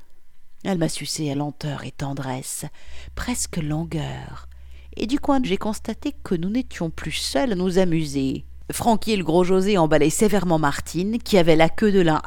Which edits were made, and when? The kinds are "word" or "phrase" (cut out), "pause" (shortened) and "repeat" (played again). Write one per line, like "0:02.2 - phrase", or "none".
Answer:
0:01.3 - word
0:05.4 - word